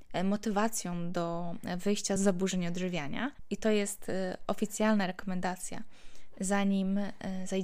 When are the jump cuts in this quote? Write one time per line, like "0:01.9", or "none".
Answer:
none